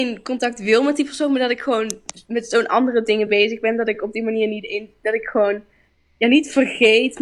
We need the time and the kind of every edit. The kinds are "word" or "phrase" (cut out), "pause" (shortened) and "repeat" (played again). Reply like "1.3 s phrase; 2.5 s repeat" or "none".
none